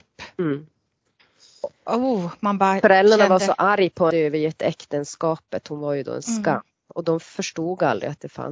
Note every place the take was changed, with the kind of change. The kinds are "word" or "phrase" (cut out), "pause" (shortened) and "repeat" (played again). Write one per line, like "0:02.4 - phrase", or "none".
0:04.1 - phrase